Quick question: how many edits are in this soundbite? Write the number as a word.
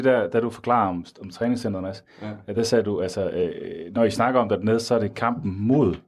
zero